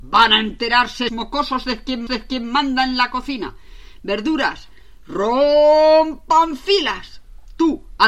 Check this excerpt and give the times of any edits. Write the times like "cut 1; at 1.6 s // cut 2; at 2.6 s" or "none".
cut 1; at 1.1 s // cut 2; at 2.1 s